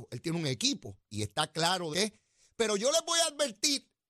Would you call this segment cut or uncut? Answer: cut